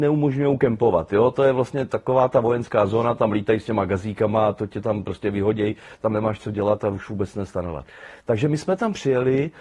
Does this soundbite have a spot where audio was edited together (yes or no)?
no